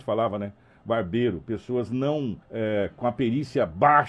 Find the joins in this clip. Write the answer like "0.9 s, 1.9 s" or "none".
2.4 s